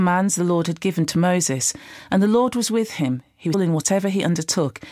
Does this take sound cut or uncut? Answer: cut